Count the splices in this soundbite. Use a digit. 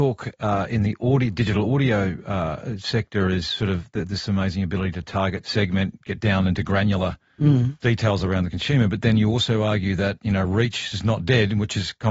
0